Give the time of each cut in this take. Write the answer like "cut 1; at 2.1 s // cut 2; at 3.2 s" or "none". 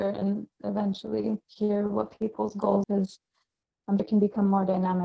cut 1; at 2.8 s // cut 2; at 4.0 s